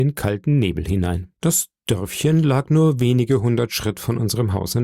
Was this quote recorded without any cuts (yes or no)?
no